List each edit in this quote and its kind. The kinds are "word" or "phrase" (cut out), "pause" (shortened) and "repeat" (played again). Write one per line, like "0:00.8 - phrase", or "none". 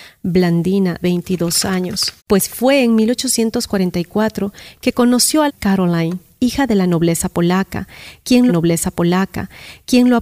0:01.0 - word
0:02.2 - pause
0:05.5 - phrase
0:08.5 - repeat